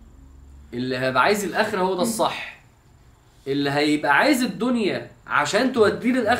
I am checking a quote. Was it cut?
no; 0 cuts

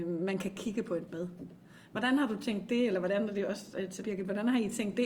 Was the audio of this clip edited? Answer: yes; 2 cuts; at 1.1 s, 4.0 s

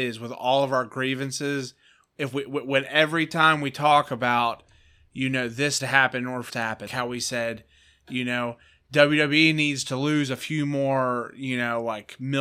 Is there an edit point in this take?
yes; 3 cuts; at 5.8 s, 6.5 s, 6.9 s

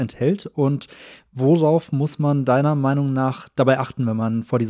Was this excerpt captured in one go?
yes; 0 cuts

